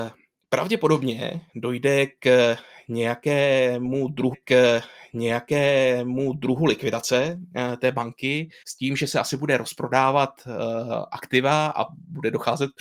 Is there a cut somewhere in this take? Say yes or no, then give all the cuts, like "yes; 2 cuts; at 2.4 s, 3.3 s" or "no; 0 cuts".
yes; 3 cuts; at 1.5 s, 4.3 s, 8.6 s